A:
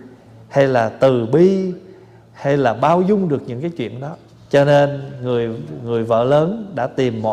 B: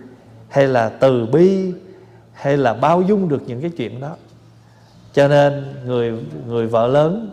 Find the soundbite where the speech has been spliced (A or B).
A